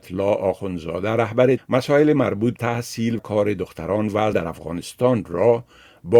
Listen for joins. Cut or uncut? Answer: cut